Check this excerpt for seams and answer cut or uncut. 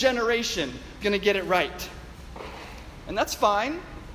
cut